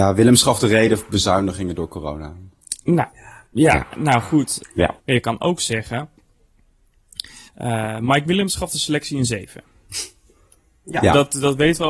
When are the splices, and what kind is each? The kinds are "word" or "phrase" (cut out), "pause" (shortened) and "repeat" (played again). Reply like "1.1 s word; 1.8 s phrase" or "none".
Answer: 3.5 s pause; 5.0 s pause; 7.5 s pause